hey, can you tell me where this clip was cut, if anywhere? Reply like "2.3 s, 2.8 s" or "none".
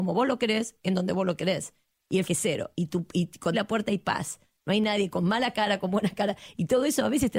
2.2 s, 3.5 s